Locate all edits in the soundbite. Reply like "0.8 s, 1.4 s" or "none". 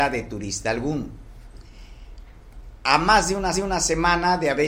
3.5 s